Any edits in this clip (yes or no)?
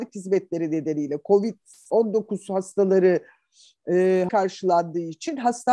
yes